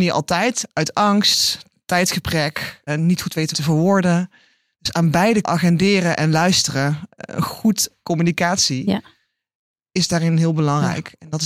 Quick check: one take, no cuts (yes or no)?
no